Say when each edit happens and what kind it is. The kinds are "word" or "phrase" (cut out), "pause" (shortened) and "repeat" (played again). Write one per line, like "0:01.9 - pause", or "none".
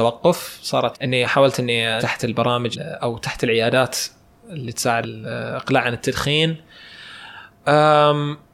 0:00.9 - word
0:02.0 - word
0:02.7 - word
0:05.0 - word